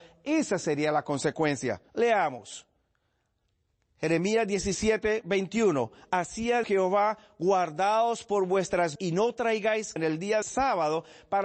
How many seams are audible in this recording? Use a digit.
5